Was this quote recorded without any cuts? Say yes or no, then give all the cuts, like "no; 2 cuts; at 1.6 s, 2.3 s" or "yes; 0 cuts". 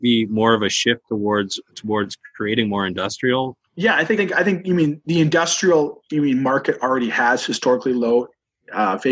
no; 3 cuts; at 1.7 s, 3.7 s, 4.2 s